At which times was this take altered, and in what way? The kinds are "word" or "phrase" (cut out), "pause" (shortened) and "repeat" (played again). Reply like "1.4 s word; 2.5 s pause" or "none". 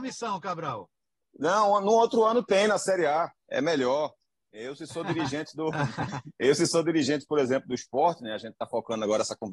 none

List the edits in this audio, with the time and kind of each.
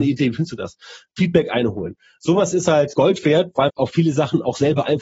2.9 s word; 3.7 s word

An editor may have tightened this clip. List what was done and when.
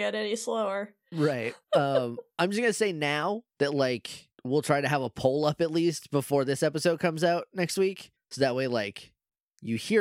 1.6 s pause; 4.3 s pause; 8.2 s pause

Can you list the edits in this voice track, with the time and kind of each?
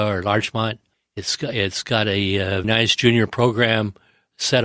0.9 s pause; 2.6 s word

